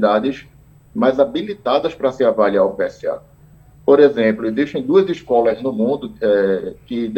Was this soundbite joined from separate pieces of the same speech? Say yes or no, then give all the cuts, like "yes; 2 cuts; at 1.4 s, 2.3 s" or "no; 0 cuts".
no; 0 cuts